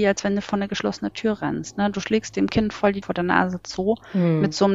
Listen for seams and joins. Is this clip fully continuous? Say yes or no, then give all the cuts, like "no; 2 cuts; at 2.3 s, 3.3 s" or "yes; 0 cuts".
no; 1 cut; at 3.0 s